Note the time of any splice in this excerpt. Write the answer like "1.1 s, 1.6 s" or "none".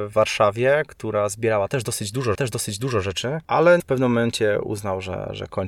2.3 s, 3.8 s